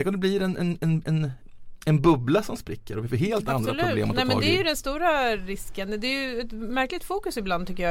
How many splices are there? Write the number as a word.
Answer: zero